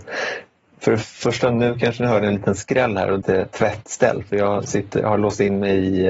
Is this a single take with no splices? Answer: no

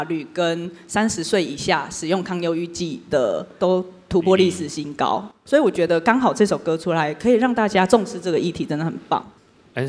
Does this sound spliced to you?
no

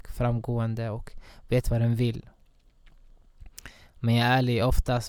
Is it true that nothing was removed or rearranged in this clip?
yes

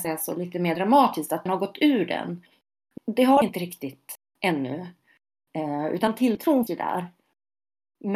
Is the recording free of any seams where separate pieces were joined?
no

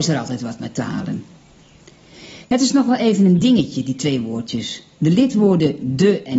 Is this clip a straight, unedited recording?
yes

